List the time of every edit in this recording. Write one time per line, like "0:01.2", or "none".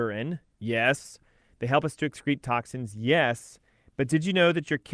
none